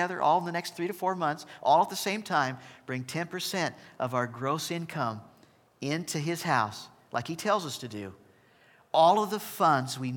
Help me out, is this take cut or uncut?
uncut